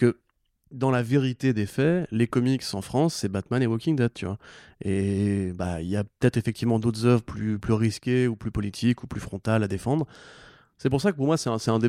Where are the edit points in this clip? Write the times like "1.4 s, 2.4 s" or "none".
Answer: none